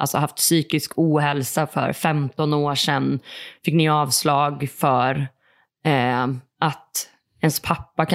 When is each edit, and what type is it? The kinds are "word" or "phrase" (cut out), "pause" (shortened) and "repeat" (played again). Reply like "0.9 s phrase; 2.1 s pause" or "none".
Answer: none